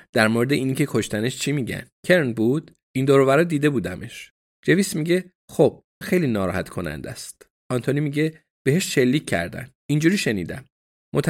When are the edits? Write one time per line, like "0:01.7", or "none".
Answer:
0:02.0
0:02.8
0:06.0
0:09.8